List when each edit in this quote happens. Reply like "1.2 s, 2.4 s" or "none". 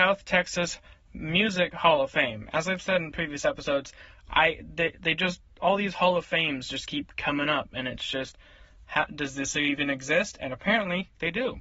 none